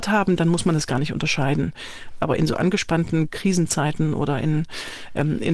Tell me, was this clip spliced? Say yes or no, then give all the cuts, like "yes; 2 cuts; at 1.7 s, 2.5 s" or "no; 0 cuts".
no; 0 cuts